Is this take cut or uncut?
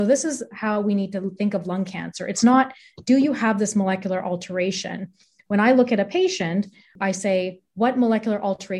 uncut